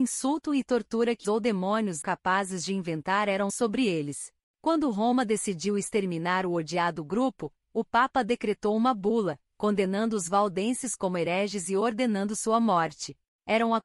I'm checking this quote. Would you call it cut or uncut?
cut